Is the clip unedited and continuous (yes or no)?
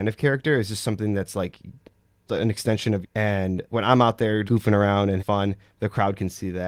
no